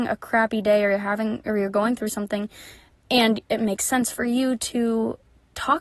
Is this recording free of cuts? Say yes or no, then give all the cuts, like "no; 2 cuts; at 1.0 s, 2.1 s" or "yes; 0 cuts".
yes; 0 cuts